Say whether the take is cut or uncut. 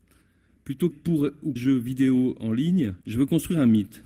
cut